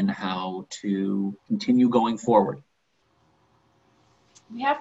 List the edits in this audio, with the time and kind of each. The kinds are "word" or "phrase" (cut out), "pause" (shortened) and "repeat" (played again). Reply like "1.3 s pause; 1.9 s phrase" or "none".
1.4 s pause